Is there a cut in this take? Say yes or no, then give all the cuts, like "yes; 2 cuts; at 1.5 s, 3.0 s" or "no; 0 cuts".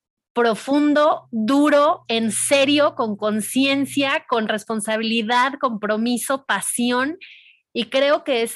no; 0 cuts